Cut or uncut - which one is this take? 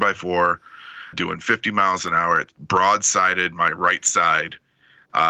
cut